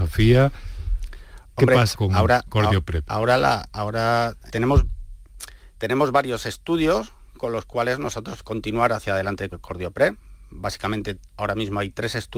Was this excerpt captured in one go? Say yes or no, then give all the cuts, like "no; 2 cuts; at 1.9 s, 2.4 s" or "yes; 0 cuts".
no; 4 cuts; at 1.9 s, 4.5 s, 8.4 s, 9.5 s